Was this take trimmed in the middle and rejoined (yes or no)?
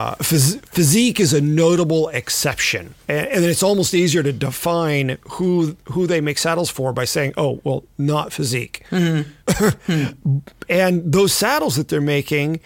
yes